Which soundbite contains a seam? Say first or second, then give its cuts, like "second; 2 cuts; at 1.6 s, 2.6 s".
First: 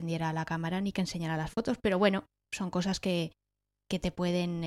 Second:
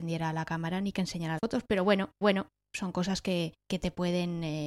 second; 3 cuts; at 1.4 s, 2.2 s, 3.6 s